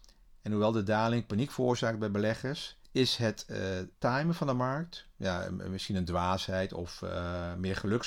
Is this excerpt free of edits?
no; 2 cuts; at 2.8 s, 3.9 s

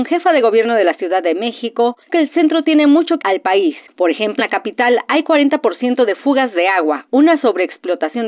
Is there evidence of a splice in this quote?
yes; 3 cuts; at 2.1 s, 3.2 s, 4.4 s

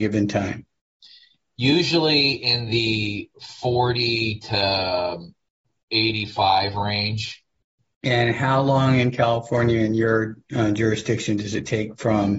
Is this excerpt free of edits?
yes; 0 cuts

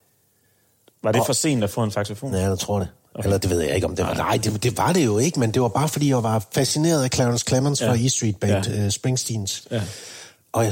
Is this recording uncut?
yes; 0 cuts

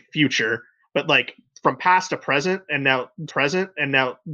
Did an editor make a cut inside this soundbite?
yes; 1 cut; at 3.3 s

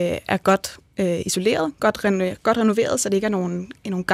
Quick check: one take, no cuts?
yes; 0 cuts

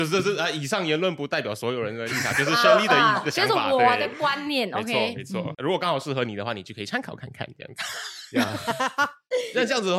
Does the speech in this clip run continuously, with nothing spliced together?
no; 1 cut; at 5.5 s

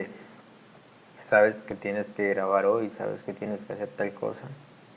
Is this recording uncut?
yes; 0 cuts

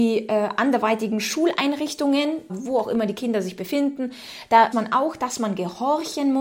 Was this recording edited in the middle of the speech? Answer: yes; 2 cuts; at 2.5 s, 4.7 s

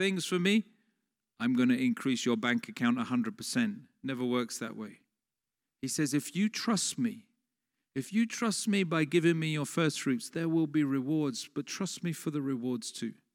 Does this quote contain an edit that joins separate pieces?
no; 0 cuts

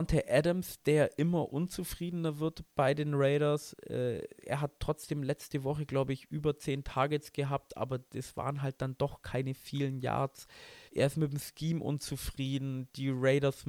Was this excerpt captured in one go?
no; 1 cut; at 10.9 s

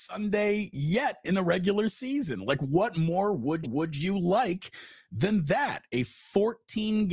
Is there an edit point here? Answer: yes; 1 cut; at 3.6 s

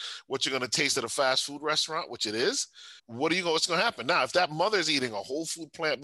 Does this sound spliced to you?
yes; 1 cut; at 3.0 s

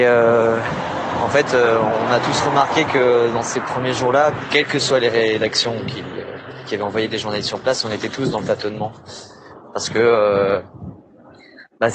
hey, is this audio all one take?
yes; 0 cuts

